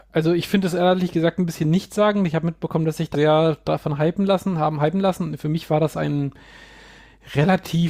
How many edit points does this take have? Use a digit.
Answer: 1